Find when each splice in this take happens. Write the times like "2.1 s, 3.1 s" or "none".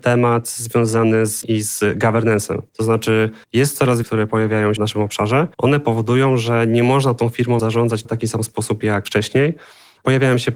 1.4 s, 2.7 s, 3.4 s, 4.0 s, 4.8 s, 5.5 s, 7.6 s, 8.0 s